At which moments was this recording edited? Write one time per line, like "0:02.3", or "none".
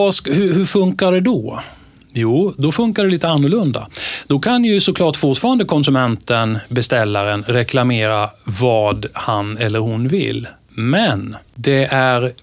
none